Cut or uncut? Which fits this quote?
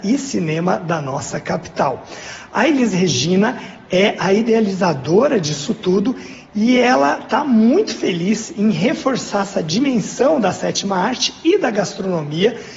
uncut